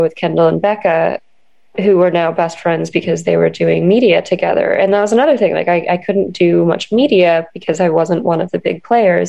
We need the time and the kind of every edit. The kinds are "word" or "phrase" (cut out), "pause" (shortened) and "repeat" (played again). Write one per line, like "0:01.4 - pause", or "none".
none

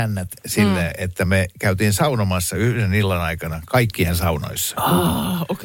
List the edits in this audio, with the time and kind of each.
none

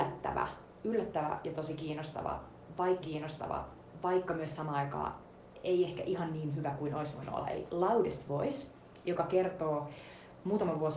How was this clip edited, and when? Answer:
0:03.0 - repeat

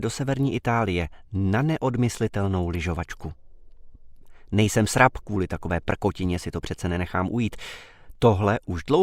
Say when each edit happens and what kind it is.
none

